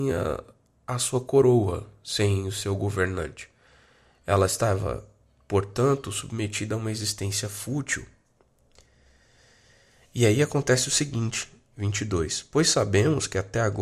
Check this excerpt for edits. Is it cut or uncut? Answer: uncut